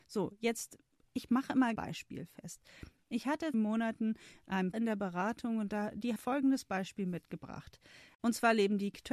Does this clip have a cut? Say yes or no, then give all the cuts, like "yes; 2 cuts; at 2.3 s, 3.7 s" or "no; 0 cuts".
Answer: yes; 4 cuts; at 1.8 s, 3.5 s, 4.7 s, 6.2 s